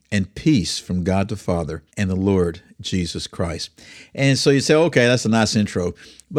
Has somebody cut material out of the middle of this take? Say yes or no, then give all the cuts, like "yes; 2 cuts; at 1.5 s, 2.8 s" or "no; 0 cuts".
yes; 1 cut; at 1.9 s